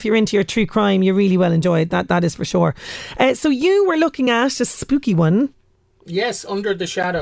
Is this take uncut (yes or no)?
yes